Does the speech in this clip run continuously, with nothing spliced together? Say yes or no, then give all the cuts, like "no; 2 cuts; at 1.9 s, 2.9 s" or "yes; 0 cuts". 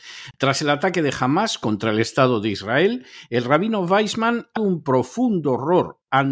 no; 1 cut; at 4.6 s